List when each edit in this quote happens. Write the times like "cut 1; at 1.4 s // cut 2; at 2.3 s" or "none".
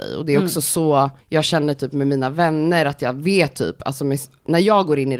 cut 1; at 1.2 s